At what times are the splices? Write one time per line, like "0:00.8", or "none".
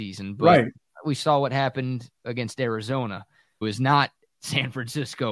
0:03.6